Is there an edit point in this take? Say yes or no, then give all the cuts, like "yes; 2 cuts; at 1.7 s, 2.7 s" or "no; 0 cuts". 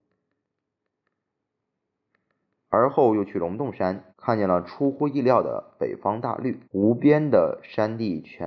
yes; 2 cuts; at 4.1 s, 6.6 s